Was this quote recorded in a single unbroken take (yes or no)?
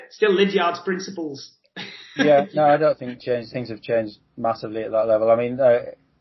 no